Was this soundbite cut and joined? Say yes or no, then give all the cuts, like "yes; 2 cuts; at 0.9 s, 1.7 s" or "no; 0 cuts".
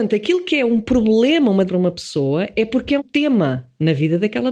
yes; 2 cuts; at 1.7 s, 3.0 s